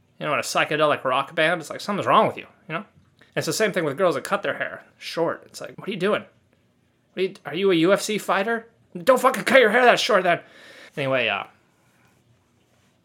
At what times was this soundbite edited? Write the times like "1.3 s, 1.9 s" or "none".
3.3 s, 4.9 s, 5.7 s, 10.9 s